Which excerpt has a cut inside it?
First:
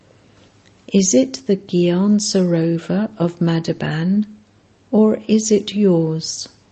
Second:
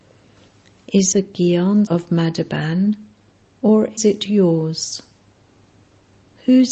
second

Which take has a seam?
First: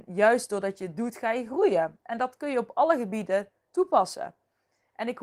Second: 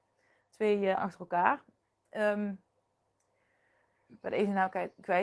second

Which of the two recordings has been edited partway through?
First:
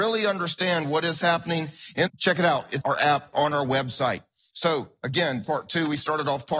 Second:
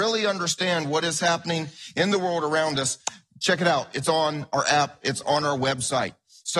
first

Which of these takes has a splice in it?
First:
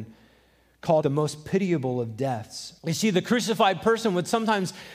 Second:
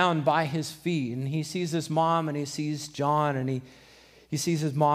first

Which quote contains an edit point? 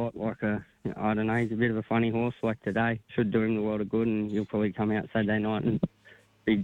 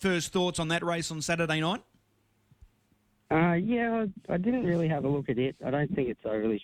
first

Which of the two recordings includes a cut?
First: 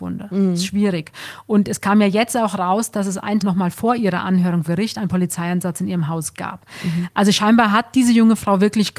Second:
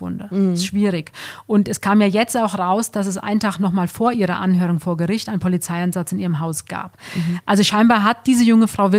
first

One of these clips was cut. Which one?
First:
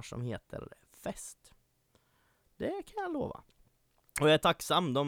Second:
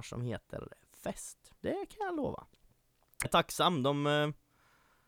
second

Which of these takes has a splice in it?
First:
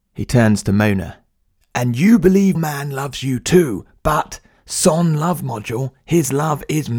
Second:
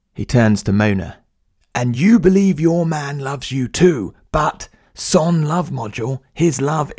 first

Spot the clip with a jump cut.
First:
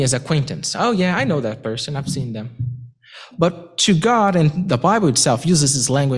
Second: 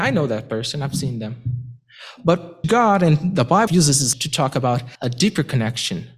second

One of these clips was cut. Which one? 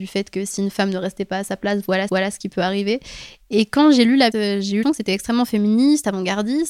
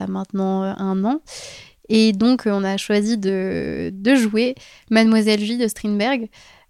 first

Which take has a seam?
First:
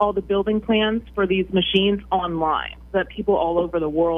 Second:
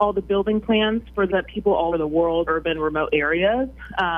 second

